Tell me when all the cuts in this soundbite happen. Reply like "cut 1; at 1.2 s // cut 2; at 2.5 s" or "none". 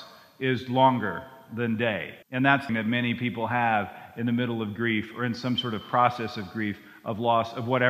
cut 1; at 2.2 s // cut 2; at 2.7 s